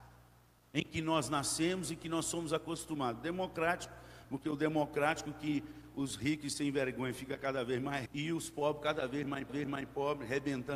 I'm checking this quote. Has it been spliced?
yes; 2 cuts; at 8.1 s, 9.5 s

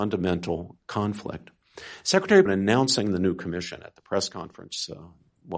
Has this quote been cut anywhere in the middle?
yes; 1 cut; at 2.5 s

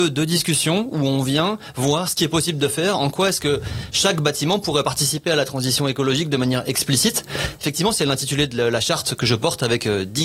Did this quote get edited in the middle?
no; 0 cuts

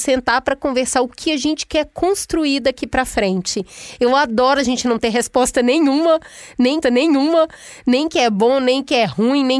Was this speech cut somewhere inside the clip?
yes; 1 cut; at 6.8 s

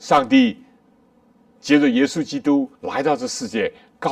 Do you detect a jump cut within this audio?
yes; 1 cut; at 2.7 s

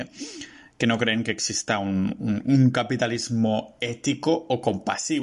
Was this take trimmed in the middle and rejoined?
no; 0 cuts

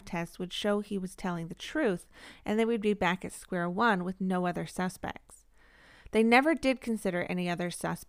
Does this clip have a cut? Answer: no; 0 cuts

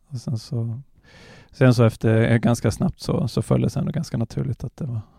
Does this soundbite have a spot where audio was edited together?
no; 0 cuts

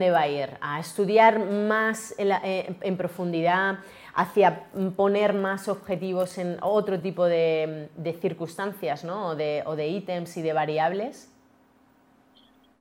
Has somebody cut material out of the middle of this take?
no; 0 cuts

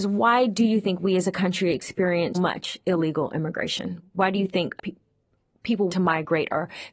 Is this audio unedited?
no; 3 cuts; at 2.3 s, 4.8 s, 5.9 s

